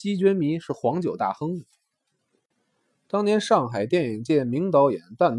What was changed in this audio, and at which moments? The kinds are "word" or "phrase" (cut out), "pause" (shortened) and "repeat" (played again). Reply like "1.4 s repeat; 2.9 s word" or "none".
none